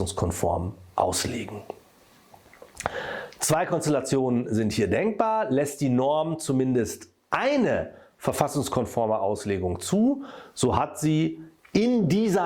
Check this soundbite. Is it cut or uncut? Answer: uncut